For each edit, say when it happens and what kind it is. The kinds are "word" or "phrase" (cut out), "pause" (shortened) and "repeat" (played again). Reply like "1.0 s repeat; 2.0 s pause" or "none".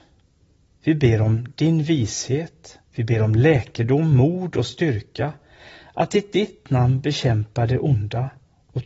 2.9 s pause